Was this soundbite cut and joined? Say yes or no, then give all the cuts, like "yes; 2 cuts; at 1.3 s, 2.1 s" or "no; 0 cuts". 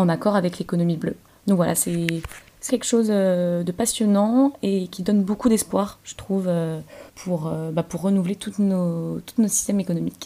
yes; 3 cuts; at 1.3 s, 2.7 s, 7.1 s